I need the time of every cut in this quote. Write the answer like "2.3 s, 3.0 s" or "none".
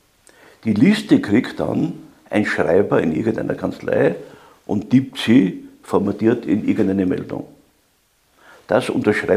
none